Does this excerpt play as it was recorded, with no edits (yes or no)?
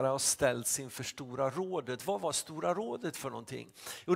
yes